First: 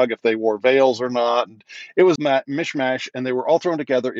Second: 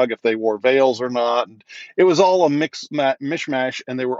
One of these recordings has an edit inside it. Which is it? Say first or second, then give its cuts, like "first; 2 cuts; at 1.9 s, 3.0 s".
first; 1 cut; at 2.2 s